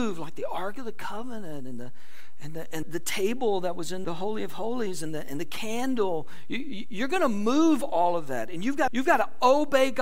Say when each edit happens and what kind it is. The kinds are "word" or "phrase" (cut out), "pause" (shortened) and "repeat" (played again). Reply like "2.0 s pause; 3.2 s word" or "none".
2.8 s word; 4.0 s word; 8.9 s word